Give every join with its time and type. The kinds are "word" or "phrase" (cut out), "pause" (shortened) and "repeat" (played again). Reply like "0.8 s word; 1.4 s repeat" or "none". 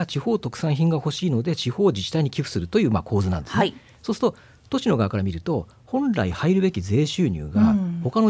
none